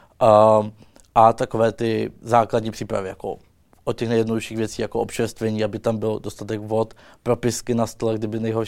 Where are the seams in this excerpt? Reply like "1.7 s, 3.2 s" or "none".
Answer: none